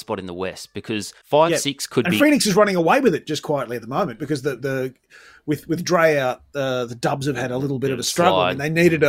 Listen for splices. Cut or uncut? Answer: cut